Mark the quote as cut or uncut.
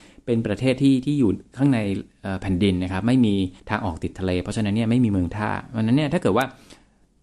cut